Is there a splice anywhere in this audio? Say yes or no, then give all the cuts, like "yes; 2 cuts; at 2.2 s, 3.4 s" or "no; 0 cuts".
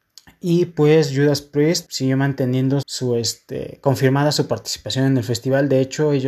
yes; 2 cuts; at 1.9 s, 2.8 s